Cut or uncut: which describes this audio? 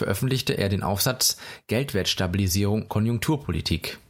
cut